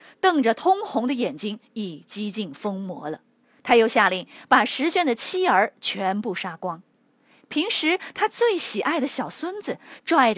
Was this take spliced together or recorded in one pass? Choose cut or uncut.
cut